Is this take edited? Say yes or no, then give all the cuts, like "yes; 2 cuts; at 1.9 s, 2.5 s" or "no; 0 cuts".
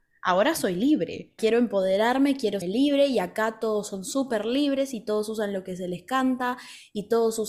yes; 1 cut; at 2.6 s